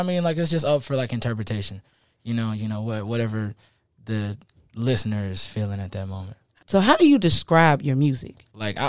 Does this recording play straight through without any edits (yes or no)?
yes